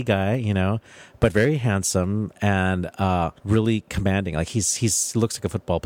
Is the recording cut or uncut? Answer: cut